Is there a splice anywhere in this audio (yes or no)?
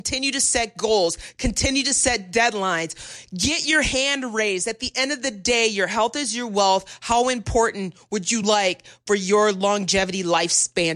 no